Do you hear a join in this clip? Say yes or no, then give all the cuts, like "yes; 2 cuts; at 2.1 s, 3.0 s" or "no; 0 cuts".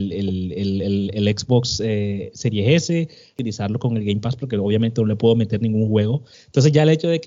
no; 0 cuts